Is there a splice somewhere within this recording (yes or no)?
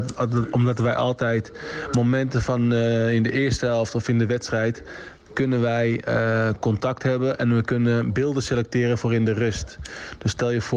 no